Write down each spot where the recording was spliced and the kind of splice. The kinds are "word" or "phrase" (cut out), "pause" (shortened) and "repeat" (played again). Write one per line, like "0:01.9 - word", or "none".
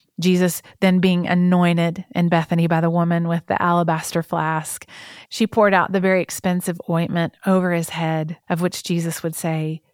0:08.4 - pause